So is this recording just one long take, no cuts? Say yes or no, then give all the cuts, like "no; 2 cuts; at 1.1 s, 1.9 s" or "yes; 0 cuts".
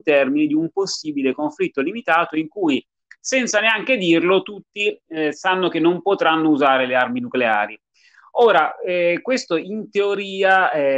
yes; 0 cuts